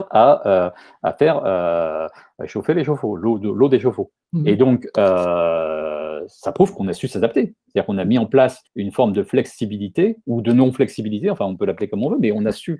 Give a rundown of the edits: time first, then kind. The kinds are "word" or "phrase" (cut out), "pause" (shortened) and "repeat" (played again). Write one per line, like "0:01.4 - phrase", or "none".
0:08.7 - pause